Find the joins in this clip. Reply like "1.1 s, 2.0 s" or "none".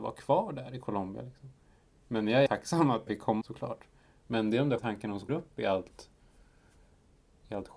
2.5 s, 3.1 s, 3.4 s, 4.8 s, 5.3 s